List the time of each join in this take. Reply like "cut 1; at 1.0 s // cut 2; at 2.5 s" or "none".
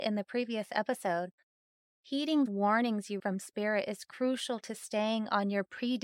cut 1; at 2.5 s // cut 2; at 3.2 s